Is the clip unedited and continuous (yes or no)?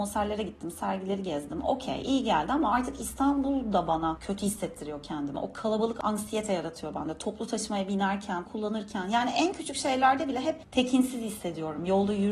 no